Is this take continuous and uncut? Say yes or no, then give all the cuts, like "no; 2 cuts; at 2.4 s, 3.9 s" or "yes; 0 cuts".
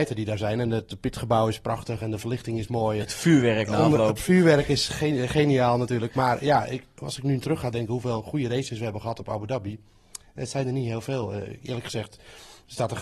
yes; 0 cuts